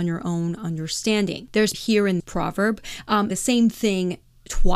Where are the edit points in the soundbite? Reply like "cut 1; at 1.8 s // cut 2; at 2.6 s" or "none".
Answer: cut 1; at 1.7 s // cut 2; at 2.2 s // cut 3; at 3.3 s